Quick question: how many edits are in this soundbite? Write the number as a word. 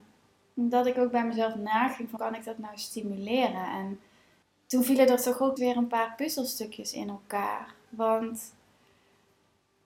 three